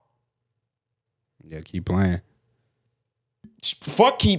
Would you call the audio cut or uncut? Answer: uncut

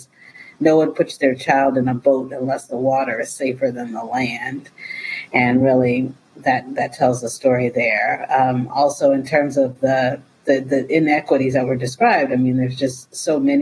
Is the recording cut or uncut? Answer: uncut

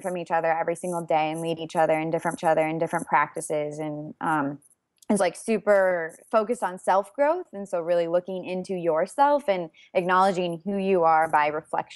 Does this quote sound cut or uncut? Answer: cut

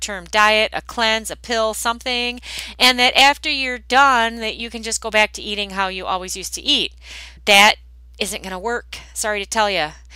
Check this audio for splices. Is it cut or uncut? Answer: cut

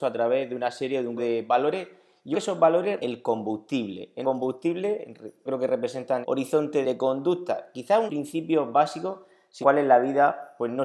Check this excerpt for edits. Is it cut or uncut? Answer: cut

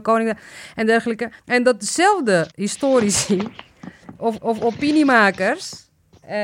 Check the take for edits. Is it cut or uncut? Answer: cut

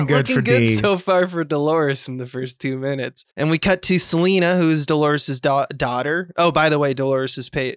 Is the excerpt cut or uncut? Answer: cut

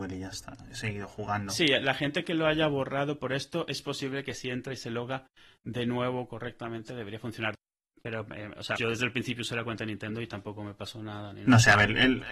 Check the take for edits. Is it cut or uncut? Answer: cut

